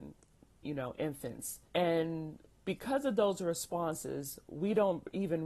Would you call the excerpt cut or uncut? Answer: cut